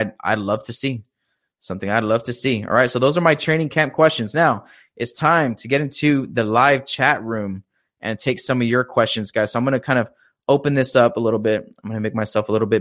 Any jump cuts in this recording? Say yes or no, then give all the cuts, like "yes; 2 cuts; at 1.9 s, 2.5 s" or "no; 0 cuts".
no; 0 cuts